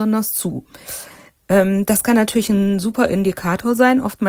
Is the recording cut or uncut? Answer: uncut